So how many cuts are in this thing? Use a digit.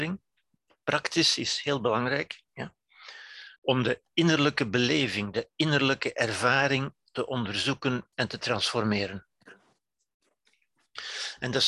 2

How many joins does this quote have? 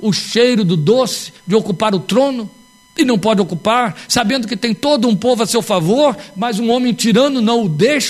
0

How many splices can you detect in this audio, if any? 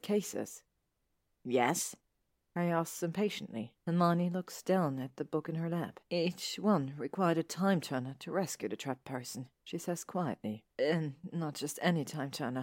4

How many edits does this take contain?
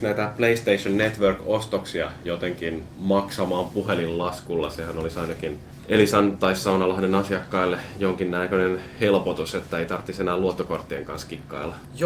0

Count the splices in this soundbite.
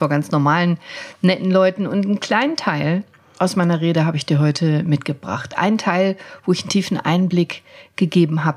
0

